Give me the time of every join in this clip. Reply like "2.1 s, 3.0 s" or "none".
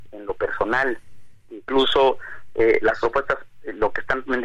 1.4 s